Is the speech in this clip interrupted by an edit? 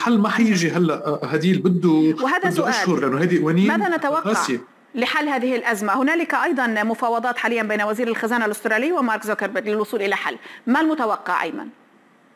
no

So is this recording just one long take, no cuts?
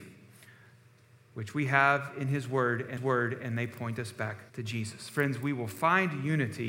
no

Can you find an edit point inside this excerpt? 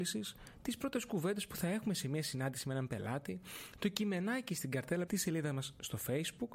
yes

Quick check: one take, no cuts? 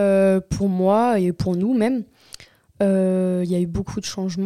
yes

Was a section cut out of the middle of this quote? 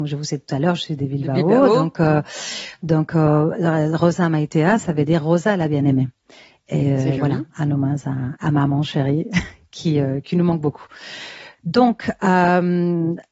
no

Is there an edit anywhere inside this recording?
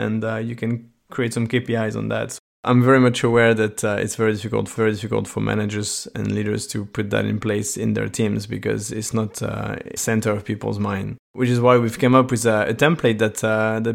yes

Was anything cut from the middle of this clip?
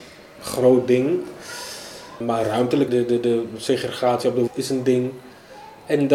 yes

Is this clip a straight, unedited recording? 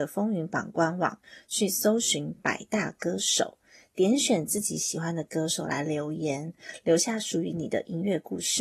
yes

